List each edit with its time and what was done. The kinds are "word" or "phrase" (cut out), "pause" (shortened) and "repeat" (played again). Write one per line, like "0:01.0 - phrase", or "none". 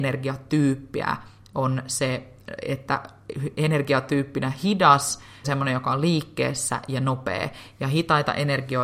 0:05.4 - word